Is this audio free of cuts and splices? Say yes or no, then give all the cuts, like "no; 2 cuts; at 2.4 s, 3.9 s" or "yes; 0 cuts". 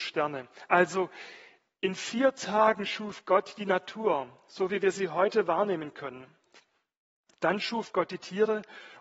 yes; 0 cuts